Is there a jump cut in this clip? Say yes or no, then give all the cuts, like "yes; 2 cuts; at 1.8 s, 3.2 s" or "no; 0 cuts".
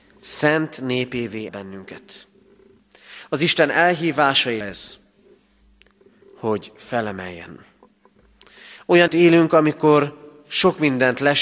yes; 3 cuts; at 1.5 s, 4.6 s, 9.1 s